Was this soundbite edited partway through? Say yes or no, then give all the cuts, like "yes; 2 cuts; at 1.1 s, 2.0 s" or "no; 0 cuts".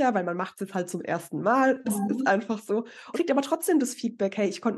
yes; 1 cut; at 3.1 s